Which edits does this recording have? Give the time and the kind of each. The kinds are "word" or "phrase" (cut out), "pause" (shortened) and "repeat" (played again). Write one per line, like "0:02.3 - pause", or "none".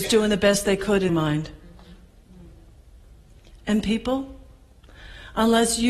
0:01.1 - word